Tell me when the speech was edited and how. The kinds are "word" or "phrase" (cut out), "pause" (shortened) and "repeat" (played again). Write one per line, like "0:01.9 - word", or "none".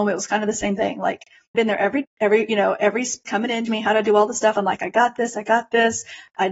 0:01.5 - word
0:02.0 - word
0:03.2 - word
0:03.7 - word